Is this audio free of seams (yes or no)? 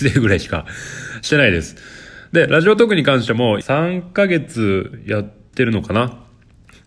no